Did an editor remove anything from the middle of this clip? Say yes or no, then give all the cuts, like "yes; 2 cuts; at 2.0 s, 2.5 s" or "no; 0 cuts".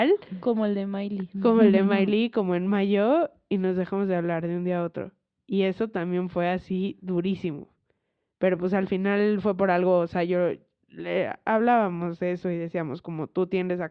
yes; 1 cut; at 1.3 s